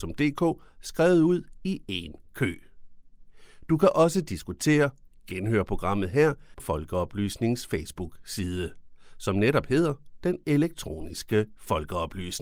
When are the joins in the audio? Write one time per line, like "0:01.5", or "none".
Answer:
0:06.6

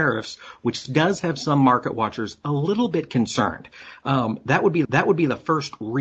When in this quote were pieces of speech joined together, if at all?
0:04.8

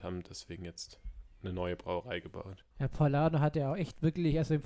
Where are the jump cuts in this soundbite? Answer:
0:02.7

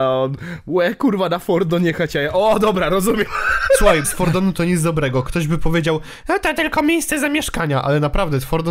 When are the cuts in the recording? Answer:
0:04.0

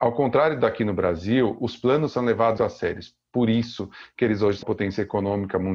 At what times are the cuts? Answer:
0:02.6
0:04.6

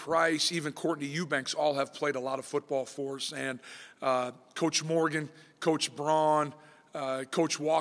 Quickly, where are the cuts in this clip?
none

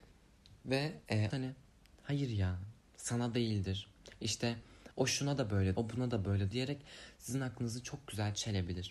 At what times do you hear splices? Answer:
0:01.3
0:02.8
0:04.9
0:05.7
0:06.5

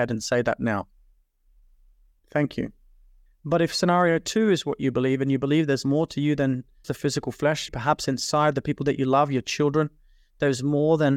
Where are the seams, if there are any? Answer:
0:06.8
0:07.7

